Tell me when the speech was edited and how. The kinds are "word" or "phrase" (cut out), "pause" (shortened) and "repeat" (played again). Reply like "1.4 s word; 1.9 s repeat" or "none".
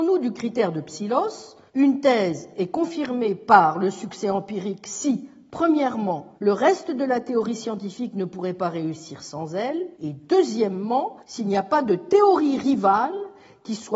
1.7 s pause; 6.4 s pause; 9.9 s pause; 11.2 s pause